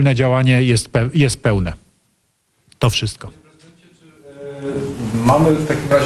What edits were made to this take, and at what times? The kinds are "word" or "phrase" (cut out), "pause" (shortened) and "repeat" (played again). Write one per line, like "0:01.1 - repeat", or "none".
none